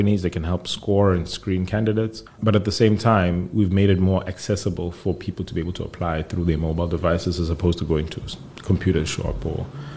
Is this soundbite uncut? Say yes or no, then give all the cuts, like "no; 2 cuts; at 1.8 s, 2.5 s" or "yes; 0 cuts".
no; 1 cut; at 2.3 s